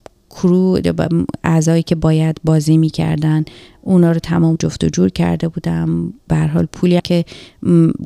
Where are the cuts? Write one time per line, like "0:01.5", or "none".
0:04.6
0:07.0